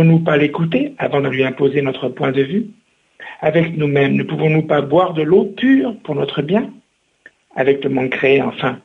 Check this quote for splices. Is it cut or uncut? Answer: uncut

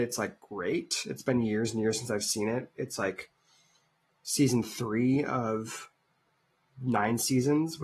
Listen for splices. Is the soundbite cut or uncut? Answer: uncut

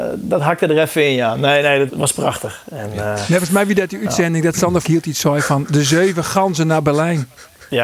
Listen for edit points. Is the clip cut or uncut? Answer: cut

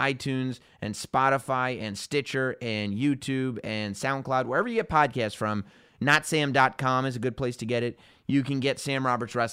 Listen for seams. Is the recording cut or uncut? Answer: uncut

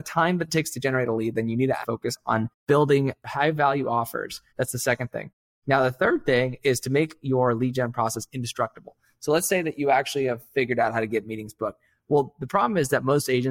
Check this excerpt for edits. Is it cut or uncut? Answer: cut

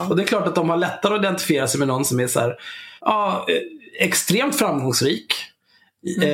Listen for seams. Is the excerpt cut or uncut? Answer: cut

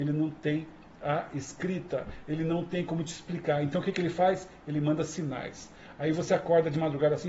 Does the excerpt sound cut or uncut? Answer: uncut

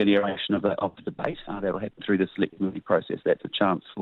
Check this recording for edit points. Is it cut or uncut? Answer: uncut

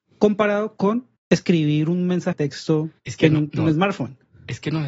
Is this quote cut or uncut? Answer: cut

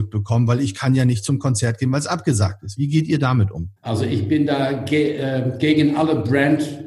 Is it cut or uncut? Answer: cut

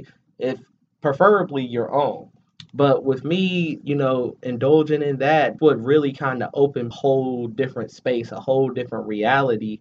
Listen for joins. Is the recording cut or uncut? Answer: cut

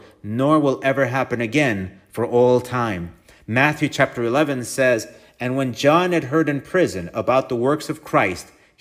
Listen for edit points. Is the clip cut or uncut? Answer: uncut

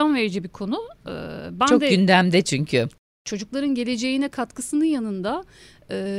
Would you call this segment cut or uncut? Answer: uncut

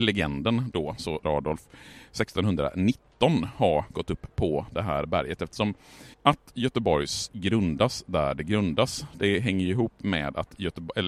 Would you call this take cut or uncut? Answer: cut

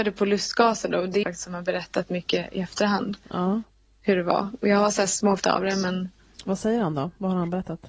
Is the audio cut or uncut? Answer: cut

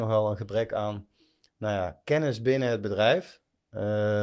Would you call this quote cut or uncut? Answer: uncut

